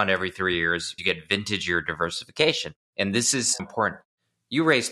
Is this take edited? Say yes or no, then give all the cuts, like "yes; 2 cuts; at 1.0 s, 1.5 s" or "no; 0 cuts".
yes; 3 cuts; at 1.0 s, 2.8 s, 3.6 s